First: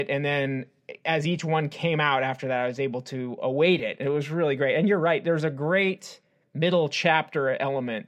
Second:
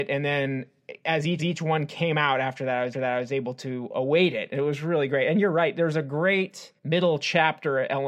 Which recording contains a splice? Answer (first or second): second